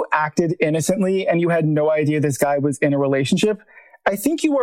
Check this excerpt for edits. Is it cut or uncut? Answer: uncut